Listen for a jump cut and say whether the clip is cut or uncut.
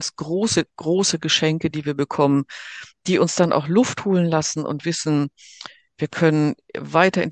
uncut